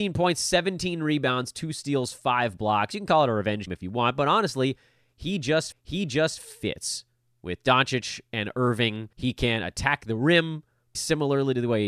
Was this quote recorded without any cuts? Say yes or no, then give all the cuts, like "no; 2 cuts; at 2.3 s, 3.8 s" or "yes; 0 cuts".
no; 4 cuts; at 3.7 s, 5.7 s, 9.1 s, 10.9 s